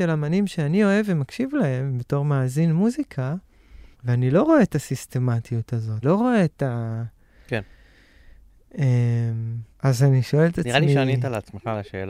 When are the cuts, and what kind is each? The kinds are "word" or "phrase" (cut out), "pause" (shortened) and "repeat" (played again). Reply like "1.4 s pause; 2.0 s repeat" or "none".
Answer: 3.9 s pause; 6.0 s word; 9.7 s pause